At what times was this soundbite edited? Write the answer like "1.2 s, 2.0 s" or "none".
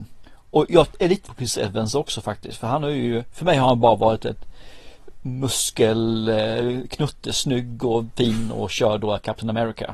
1.2 s